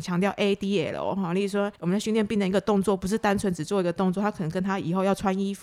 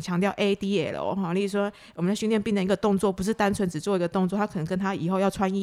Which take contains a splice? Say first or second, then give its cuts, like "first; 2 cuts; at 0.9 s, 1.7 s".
first; 1 cut; at 1.8 s